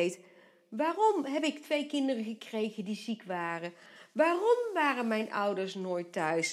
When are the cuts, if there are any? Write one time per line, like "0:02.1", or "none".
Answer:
none